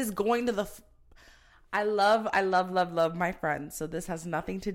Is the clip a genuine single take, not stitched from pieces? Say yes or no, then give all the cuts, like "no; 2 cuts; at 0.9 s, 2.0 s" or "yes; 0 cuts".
yes; 0 cuts